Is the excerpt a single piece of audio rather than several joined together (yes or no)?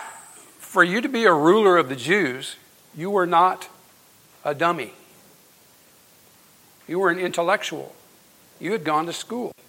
yes